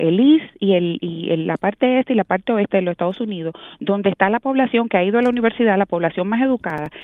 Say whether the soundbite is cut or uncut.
uncut